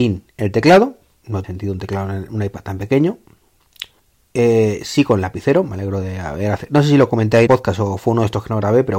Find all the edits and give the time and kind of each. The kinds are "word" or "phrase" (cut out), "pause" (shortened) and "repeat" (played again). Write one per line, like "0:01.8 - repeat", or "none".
0:01.4 - word
0:04.0 - pause
0:07.5 - phrase